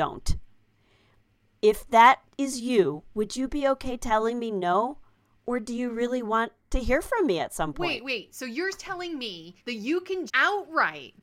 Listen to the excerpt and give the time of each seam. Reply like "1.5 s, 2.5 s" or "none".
9.6 s, 10.3 s